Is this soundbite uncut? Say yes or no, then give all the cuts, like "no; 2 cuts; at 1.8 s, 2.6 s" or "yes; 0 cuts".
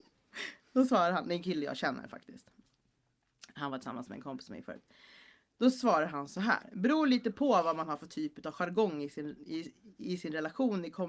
yes; 0 cuts